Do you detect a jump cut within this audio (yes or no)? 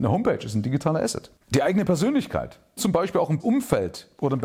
yes